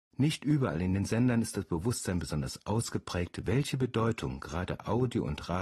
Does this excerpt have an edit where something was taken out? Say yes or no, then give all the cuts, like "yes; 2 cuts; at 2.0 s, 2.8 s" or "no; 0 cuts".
no; 0 cuts